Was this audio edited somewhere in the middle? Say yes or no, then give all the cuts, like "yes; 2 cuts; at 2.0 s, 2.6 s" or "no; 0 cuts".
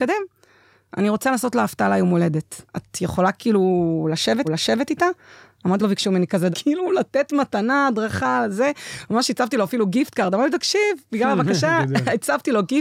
yes; 4 cuts; at 2.7 s, 4.4 s, 5.8 s, 6.5 s